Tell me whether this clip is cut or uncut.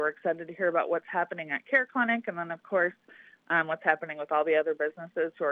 uncut